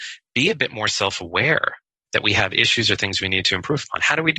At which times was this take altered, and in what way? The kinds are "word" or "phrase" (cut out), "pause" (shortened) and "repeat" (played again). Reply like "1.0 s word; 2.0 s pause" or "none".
none